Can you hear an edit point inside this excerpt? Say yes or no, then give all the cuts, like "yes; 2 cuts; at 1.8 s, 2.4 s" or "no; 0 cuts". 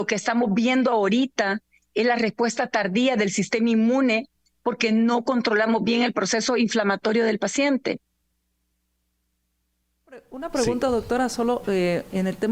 no; 0 cuts